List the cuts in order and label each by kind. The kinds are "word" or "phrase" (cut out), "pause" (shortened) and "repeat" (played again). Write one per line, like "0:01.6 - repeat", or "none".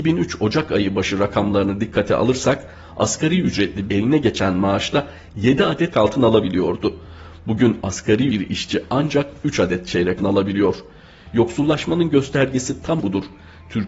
0:03.9 - phrase
0:05.9 - word
0:08.3 - word
0:10.2 - word
0:13.0 - word